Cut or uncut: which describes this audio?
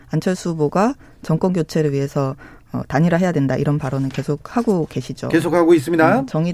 uncut